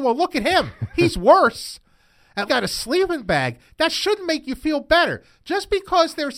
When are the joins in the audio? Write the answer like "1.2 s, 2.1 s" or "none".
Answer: 2.5 s